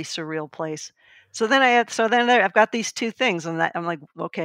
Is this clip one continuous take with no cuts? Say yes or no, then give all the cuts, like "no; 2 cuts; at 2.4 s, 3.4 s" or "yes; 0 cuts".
yes; 0 cuts